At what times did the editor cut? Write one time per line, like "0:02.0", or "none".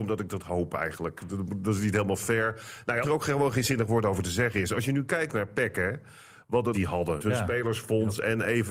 0:03.0
0:06.7
0:07.2